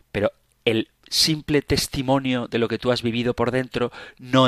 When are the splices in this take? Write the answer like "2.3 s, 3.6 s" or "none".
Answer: none